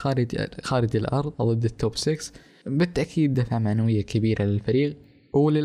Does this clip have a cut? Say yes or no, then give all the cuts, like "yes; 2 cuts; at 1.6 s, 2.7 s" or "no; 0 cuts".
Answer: no; 0 cuts